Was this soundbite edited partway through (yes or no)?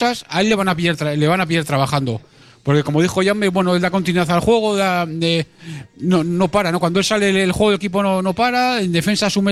no